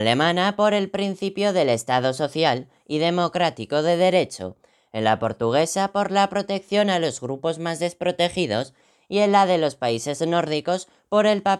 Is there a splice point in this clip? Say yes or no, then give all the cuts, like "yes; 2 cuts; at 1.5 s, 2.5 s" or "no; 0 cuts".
no; 0 cuts